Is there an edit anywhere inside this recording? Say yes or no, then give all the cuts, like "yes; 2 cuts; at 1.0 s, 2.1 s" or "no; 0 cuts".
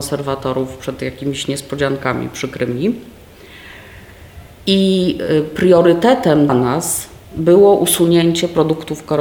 yes; 1 cut; at 6.5 s